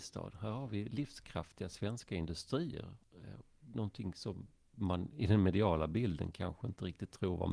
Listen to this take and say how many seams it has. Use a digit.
0